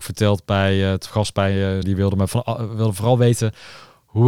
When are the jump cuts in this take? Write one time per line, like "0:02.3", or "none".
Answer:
0:01.1
0:01.8